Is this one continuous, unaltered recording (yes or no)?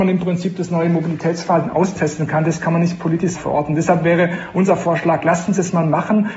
no